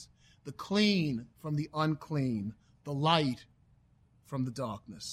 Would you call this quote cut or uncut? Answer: uncut